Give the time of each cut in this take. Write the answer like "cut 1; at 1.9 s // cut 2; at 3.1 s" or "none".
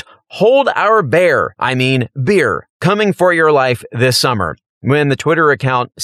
none